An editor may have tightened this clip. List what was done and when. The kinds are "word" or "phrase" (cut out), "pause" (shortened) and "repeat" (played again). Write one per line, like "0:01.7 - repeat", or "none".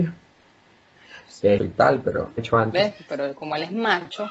0:01.6 - phrase
0:02.4 - phrase